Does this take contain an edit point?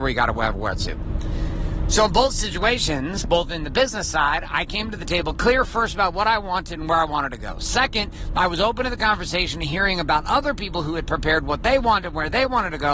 no; 0 cuts

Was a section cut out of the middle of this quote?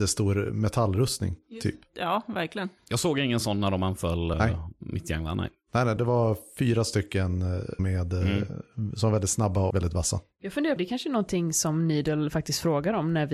yes; 5 cuts; at 4.3 s, 6.0 s, 7.8 s, 9.7 s, 10.8 s

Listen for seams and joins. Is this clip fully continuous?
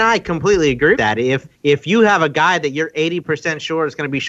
no; 2 cuts; at 0.9 s, 1.5 s

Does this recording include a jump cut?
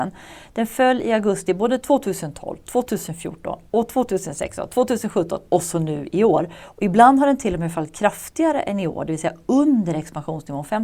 no; 0 cuts

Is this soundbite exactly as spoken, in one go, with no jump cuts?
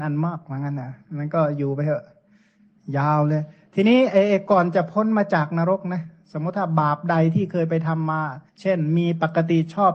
no; 1 cut; at 8.5 s

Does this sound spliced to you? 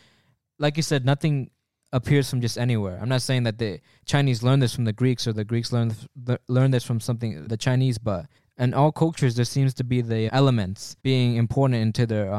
yes; 4 cuts; at 7.5 s, 8.4 s, 10.3 s, 11.0 s

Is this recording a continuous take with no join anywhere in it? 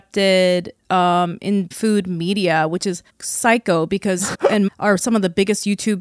no; 4 cuts; at 1.7 s, 3.1 s, 4.3 s, 4.7 s

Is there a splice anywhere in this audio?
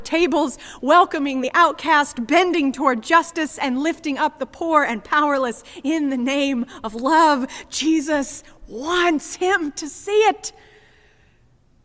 no; 0 cuts

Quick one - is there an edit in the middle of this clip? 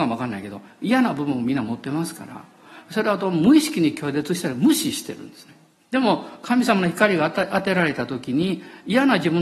yes; 1 cut; at 5.8 s

